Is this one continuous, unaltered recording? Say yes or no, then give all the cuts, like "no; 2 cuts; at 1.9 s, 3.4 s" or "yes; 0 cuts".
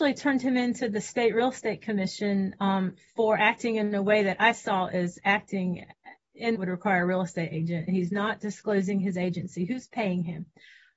no; 1 cut; at 6.5 s